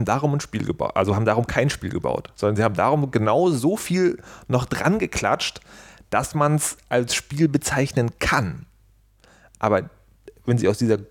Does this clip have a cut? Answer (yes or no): no